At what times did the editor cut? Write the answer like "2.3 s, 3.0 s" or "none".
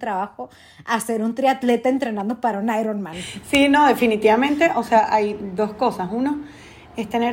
none